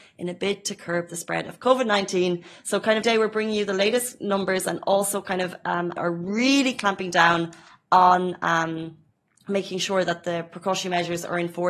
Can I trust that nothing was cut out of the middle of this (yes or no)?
no